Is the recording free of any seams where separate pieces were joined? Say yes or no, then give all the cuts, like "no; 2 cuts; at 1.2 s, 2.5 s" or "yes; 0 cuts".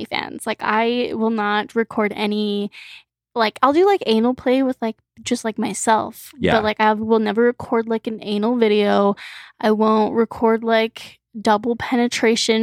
yes; 0 cuts